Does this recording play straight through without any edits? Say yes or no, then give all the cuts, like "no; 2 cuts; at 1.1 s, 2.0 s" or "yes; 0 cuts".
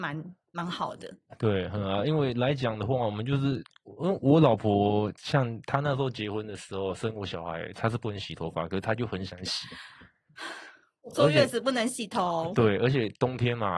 yes; 0 cuts